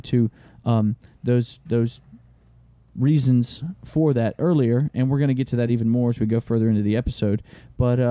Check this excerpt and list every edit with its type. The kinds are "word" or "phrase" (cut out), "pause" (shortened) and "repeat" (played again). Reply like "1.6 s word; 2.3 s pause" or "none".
none